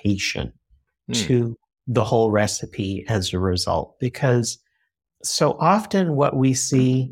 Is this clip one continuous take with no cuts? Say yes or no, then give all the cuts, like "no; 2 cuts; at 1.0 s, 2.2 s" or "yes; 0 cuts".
yes; 0 cuts